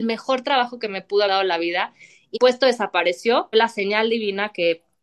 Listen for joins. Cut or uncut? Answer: cut